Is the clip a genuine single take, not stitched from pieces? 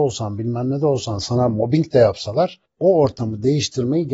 no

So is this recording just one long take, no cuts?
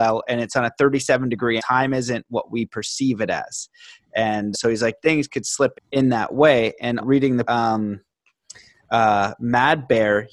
no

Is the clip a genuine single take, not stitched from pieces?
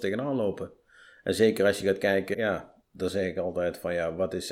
no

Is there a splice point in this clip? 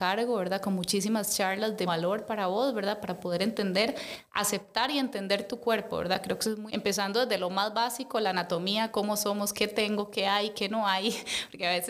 yes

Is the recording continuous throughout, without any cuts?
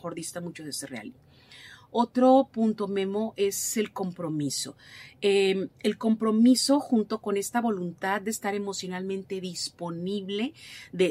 yes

